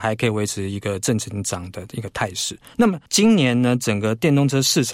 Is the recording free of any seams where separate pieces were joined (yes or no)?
no